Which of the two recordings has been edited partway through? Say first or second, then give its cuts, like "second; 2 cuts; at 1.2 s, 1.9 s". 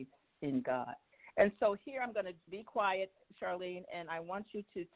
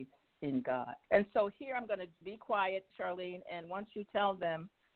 second; 4 cuts; at 1.0 s, 2.9 s, 3.6 s, 4.1 s